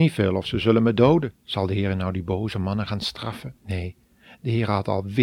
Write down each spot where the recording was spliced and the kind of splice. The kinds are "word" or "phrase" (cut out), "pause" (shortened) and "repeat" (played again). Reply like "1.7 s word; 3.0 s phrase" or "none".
1.4 s pause; 3.6 s pause